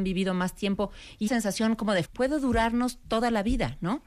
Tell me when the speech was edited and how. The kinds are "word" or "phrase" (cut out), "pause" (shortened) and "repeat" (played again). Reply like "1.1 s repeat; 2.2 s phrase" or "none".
1.3 s word; 2.0 s word